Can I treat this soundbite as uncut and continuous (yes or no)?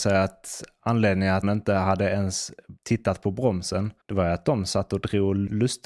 no